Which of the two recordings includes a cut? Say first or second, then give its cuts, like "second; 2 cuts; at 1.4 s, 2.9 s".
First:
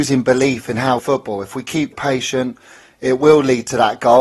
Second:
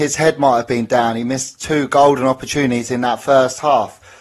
first; 2 cuts; at 1.0 s, 1.9 s